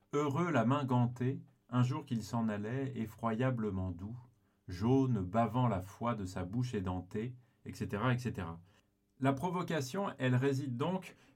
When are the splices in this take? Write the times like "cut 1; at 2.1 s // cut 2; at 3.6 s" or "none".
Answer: none